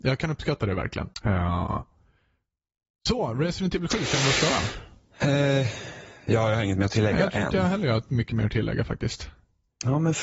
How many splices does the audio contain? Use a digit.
1